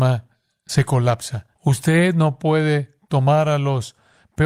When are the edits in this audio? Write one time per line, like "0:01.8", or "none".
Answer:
0:01.5